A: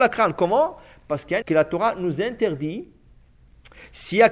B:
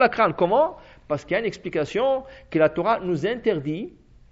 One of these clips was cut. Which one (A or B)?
A